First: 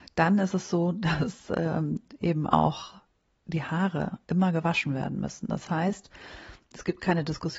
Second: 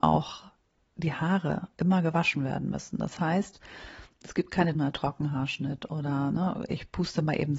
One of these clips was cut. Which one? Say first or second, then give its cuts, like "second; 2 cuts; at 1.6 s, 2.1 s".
second; 1 cut; at 4.7 s